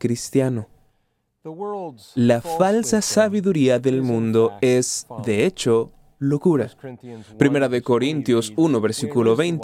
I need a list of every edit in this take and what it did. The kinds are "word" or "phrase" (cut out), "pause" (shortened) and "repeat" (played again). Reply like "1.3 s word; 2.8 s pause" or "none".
none